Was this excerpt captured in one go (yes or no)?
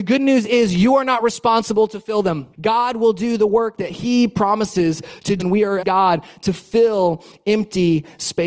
no